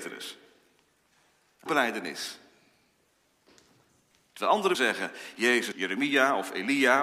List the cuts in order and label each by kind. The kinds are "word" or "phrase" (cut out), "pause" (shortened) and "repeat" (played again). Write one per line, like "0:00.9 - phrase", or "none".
0:01.7 - word
0:04.7 - word
0:05.7 - word